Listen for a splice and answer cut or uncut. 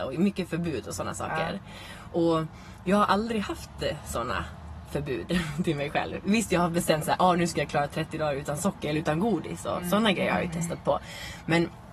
uncut